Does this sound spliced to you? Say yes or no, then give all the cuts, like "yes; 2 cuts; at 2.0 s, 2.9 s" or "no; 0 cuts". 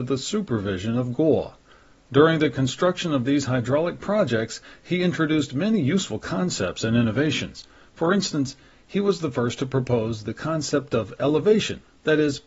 no; 0 cuts